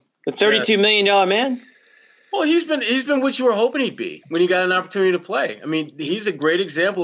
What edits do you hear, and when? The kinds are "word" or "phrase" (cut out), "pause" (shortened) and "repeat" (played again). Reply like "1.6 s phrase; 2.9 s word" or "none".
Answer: none

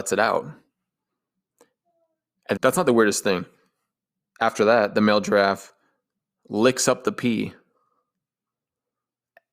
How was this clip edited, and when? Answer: 2.6 s word

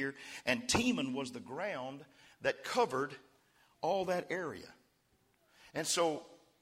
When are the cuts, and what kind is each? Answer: none

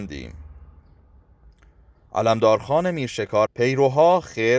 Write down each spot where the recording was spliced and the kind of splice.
3.5 s phrase

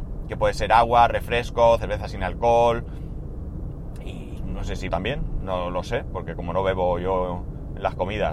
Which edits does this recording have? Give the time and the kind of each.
1.8 s word; 4.4 s word; 4.9 s word

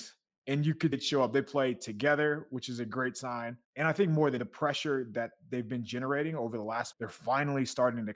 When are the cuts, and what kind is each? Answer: 0.9 s word; 3.6 s pause; 4.4 s word; 6.9 s phrase

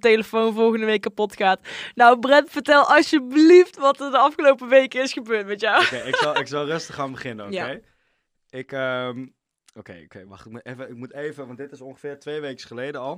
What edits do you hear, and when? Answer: none

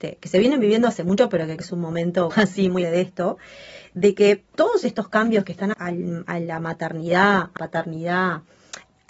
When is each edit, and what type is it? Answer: 1.6 s word; 2.3 s word; 2.8 s word; 4.5 s pause; 5.7 s word; 7.6 s word

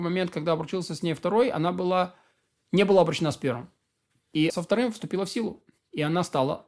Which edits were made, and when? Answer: 4.5 s word

